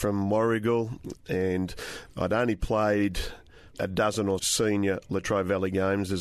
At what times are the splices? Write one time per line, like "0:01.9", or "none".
0:03.7
0:04.4